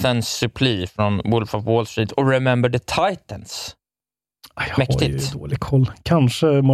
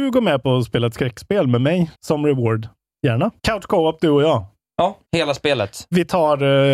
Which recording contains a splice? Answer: second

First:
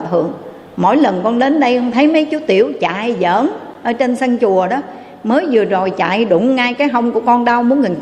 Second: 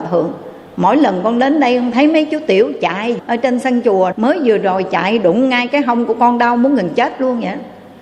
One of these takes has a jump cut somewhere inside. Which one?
second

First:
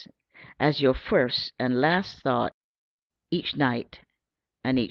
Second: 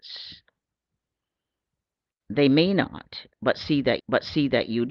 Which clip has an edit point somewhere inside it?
second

